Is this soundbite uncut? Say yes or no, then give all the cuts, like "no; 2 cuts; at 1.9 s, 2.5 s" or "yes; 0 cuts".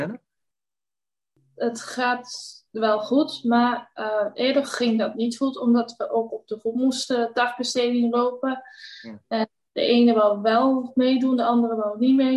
yes; 0 cuts